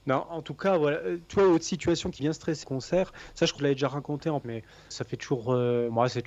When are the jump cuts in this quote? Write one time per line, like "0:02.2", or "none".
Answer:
0:02.2
0:02.6
0:03.6
0:04.4
0:04.9